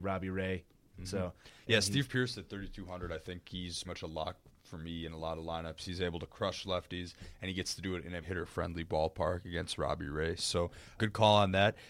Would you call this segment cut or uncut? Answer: cut